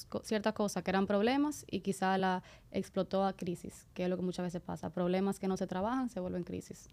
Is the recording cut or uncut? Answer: uncut